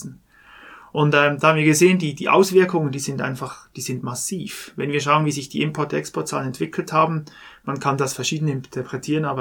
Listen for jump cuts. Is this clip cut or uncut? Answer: uncut